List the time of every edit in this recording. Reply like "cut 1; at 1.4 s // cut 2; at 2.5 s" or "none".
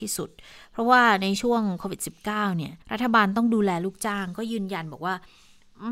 cut 1; at 2.8 s